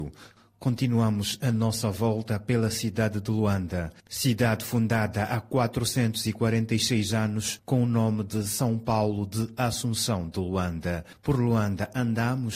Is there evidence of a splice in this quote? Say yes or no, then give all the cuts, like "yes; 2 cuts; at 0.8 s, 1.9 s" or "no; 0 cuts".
no; 0 cuts